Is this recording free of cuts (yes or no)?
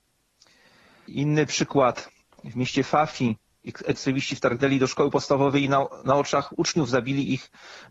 no